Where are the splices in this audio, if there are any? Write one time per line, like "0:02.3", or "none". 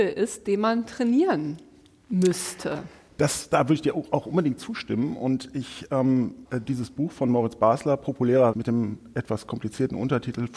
0:06.5
0:08.5